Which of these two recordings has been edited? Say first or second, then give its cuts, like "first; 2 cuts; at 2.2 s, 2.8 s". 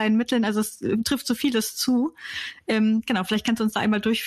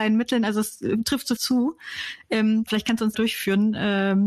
second; 3 cuts; at 1.4 s, 2.7 s, 3.1 s